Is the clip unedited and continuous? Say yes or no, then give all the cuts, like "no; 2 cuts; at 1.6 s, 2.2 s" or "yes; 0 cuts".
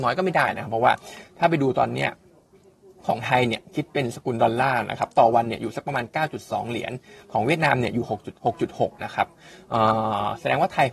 no; 1 cut; at 8.4 s